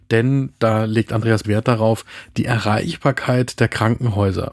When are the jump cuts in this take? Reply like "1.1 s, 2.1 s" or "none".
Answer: 1.4 s